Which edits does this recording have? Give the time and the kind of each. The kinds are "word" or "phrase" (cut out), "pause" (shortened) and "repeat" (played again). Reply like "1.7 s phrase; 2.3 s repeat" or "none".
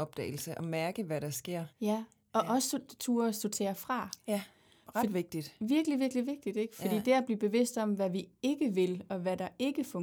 1.7 s pause